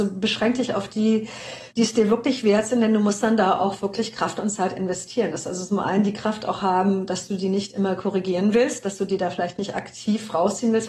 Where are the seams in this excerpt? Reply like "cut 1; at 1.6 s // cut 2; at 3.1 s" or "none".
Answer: cut 1; at 1.7 s

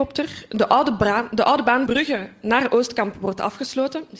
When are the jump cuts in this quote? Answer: cut 1; at 1.9 s

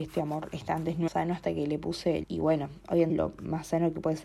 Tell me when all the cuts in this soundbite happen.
cut 1; at 1.1 s // cut 2; at 2.2 s // cut 3; at 3.1 s

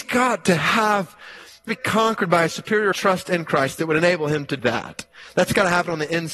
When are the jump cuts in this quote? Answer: cut 1; at 1.7 s // cut 2; at 2.9 s // cut 3; at 4.6 s

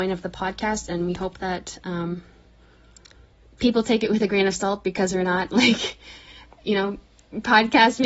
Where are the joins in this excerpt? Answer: none

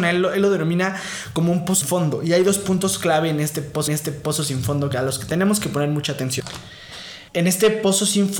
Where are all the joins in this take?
cut 1; at 1.8 s // cut 2; at 3.9 s // cut 3; at 7.3 s

